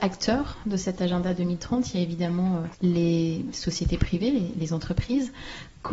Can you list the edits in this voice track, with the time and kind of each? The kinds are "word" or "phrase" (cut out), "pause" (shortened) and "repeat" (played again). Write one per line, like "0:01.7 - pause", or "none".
0:02.7 - pause